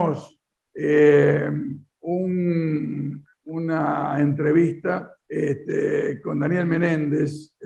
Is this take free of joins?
no; 1 cut; at 5.2 s

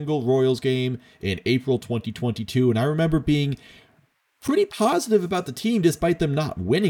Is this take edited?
no; 0 cuts

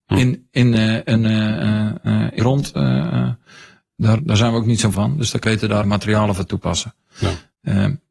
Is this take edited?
yes; 5 cuts; at 2.4 s, 4.2 s, 4.9 s, 5.4 s, 5.8 s

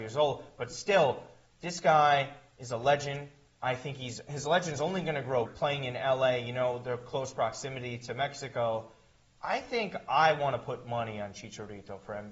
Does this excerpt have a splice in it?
yes; 1 cut; at 5.5 s

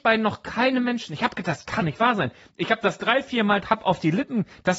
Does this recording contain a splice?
yes; 2 cuts; at 1.8 s, 3.6 s

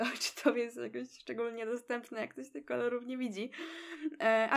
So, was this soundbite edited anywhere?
no; 0 cuts

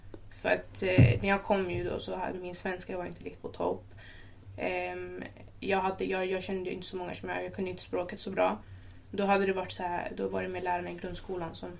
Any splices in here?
yes; 1 cut; at 5.5 s

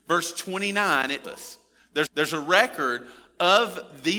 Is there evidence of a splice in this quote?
yes; 2 cuts; at 1.2 s, 2.1 s

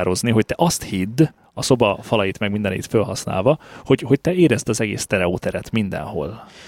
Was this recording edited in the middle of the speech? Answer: no; 0 cuts

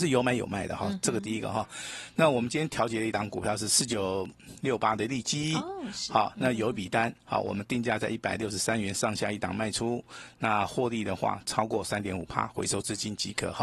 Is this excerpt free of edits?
yes; 0 cuts

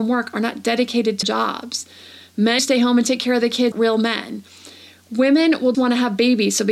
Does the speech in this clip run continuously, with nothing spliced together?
no; 4 cuts; at 1.2 s, 2.6 s, 3.7 s, 5.7 s

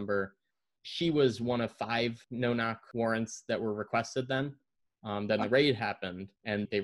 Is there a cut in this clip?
no; 0 cuts

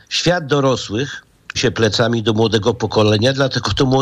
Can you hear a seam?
yes; 1 cut; at 1.5 s

